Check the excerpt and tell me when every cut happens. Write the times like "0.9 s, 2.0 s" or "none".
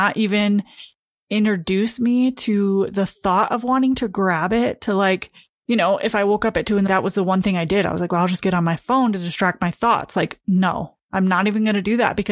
6.9 s